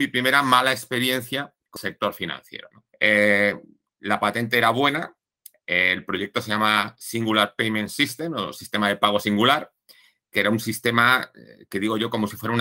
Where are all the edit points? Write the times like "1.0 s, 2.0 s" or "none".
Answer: 1.8 s, 2.9 s